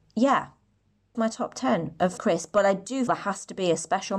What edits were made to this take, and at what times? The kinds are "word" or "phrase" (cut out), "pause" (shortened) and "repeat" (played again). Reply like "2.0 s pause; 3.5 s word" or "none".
1.1 s word; 2.2 s word; 3.1 s word